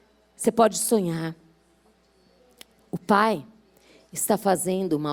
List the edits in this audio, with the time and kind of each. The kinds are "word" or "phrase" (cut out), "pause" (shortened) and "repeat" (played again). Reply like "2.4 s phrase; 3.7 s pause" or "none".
none